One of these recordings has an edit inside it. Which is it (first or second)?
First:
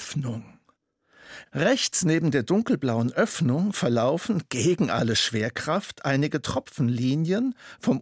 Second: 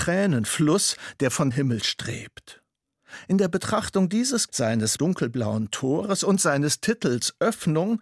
second